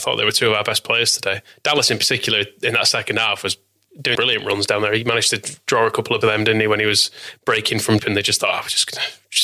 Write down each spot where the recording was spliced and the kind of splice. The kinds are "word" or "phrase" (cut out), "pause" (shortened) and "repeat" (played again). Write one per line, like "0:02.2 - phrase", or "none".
0:04.1 - word
0:06.2 - word
0:08.0 - word